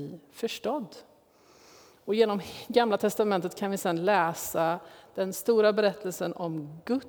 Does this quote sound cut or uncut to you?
uncut